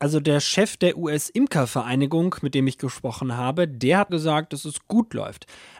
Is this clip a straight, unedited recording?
no; 1 cut; at 4.1 s

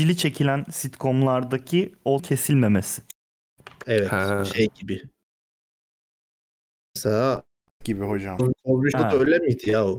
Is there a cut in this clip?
yes; 3 cuts; at 2.2 s, 7.8 s, 8.9 s

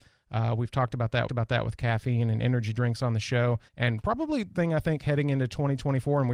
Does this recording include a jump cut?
yes; 3 cuts; at 1.3 s, 3.7 s, 4.6 s

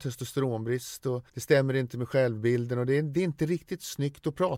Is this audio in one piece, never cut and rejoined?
no; 1 cut; at 1.3 s

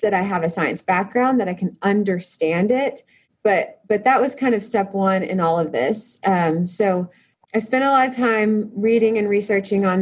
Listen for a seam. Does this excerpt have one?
yes; 1 cut; at 7.4 s

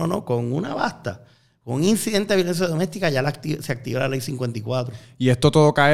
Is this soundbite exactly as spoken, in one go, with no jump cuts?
yes; 0 cuts

